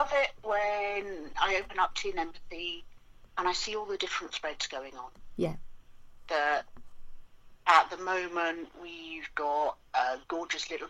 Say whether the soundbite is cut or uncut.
cut